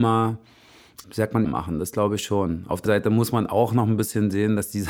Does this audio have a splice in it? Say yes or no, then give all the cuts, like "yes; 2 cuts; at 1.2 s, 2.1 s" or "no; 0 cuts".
yes; 3 cuts; at 1.0 s, 1.4 s, 2.9 s